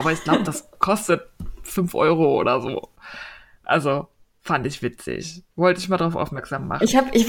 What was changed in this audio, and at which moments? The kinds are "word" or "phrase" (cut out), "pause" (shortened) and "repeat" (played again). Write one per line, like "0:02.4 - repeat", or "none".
none